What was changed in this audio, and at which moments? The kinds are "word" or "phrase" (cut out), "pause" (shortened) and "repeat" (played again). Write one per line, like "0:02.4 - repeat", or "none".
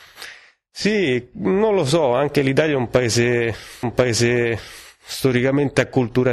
0:03.8 - repeat